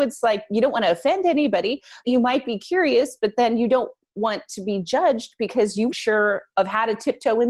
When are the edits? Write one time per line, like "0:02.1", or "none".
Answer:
0:02.0
0:05.9